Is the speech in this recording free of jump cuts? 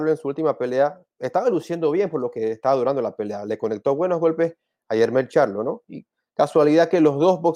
yes; 0 cuts

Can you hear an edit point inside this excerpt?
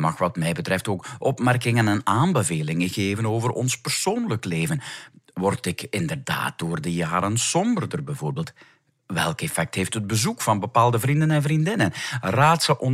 no; 0 cuts

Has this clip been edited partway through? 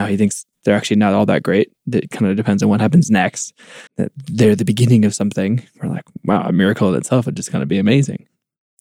yes; 1 cut; at 3.9 s

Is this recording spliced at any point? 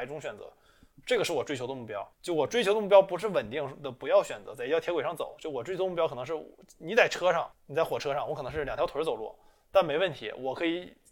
yes; 2 cuts; at 2.1 s, 7.5 s

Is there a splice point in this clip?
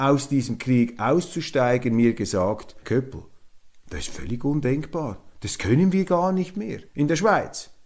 yes; 2 cuts; at 2.8 s, 6.9 s

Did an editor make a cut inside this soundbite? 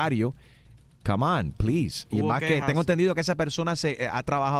no; 0 cuts

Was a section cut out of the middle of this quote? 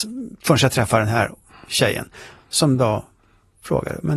no; 0 cuts

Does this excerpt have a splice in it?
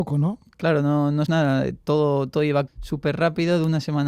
yes; 2 cuts; at 1.3 s, 2.7 s

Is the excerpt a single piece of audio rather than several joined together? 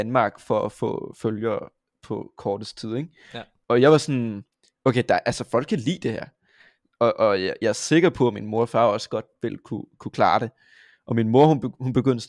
yes; 0 cuts

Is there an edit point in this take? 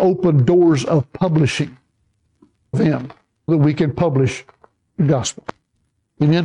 yes; 2 cuts; at 2.7 s, 3.5 s

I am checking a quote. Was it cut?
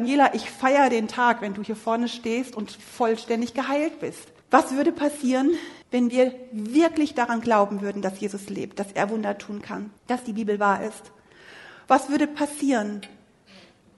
yes; 3 cuts; at 4.4 s, 5.8 s, 10.0 s

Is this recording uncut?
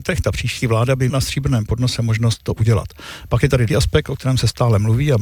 no; 2 cuts; at 1.1 s, 3.7 s

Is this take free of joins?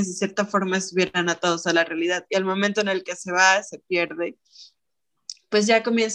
yes; 0 cuts

